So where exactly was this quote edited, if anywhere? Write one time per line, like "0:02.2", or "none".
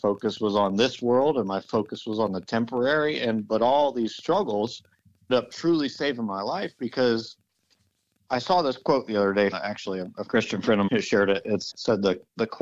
0:05.3
0:09.5
0:10.9
0:11.7